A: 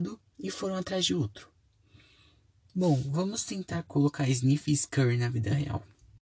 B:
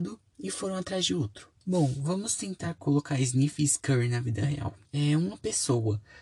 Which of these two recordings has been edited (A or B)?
B